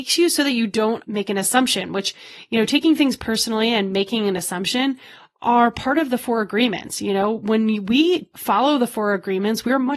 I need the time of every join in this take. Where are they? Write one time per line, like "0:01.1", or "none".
none